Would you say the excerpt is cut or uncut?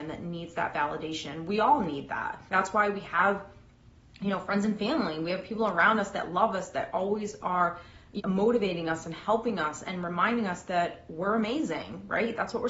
cut